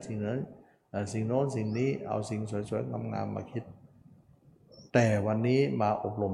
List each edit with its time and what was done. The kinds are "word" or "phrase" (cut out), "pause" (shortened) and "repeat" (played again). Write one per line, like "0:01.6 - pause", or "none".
0:04.9 - pause